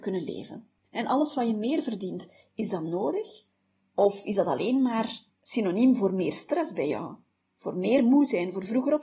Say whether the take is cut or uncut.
uncut